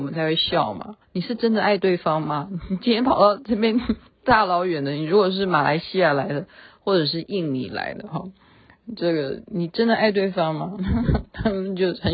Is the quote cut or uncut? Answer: cut